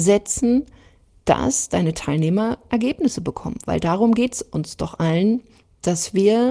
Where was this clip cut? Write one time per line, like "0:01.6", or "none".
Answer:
0:02.7